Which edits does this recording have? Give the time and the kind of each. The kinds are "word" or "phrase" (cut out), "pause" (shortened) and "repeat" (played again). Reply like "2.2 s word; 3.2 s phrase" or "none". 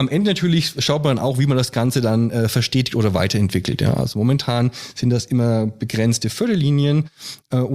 none